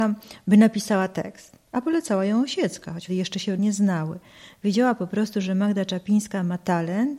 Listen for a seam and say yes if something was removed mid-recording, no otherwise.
yes